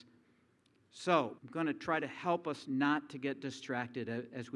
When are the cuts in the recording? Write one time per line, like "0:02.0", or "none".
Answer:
0:01.4

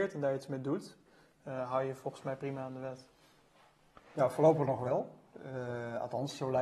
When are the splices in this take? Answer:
none

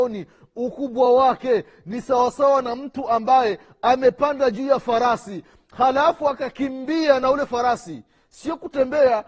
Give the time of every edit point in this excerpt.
none

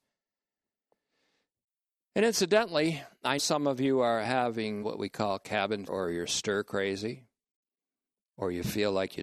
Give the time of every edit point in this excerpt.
0:03.4
0:04.8
0:05.9

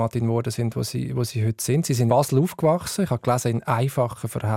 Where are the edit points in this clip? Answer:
0:02.1

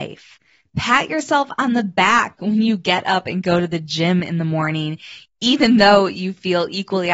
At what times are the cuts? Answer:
none

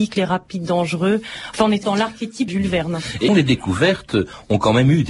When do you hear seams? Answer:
0:01.8
0:02.5
0:03.3

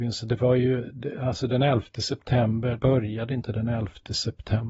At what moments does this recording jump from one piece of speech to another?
0:02.8

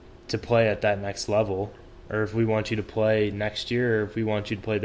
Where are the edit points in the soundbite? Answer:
none

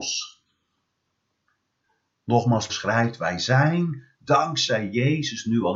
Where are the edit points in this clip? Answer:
0:02.7

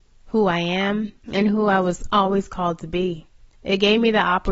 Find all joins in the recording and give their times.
0:01.2
0:03.3

